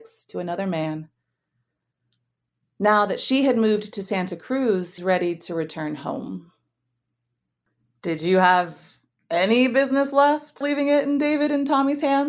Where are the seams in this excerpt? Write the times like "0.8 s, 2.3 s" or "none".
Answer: 5.0 s, 10.6 s